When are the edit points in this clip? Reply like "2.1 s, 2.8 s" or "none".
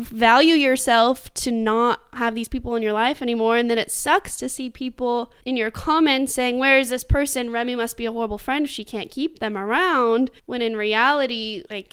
5.4 s, 10.4 s